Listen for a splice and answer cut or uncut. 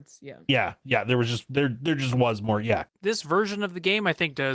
uncut